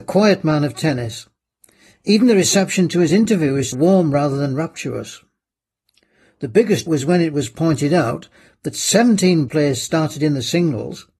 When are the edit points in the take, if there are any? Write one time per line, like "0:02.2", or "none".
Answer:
0:03.7
0:06.9
0:09.5